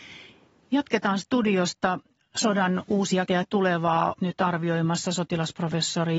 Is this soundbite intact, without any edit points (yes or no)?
no